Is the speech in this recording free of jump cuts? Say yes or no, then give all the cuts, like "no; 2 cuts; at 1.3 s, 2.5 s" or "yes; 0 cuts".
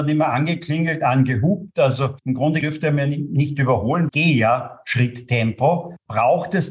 no; 2 cuts; at 2.6 s, 4.1 s